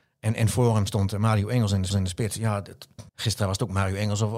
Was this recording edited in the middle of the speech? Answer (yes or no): yes